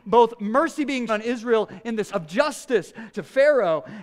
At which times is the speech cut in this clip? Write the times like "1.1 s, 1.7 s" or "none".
1.1 s, 2.1 s, 3.1 s